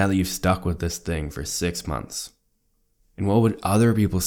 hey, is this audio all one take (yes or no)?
yes